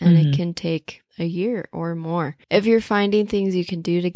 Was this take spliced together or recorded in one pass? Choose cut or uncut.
cut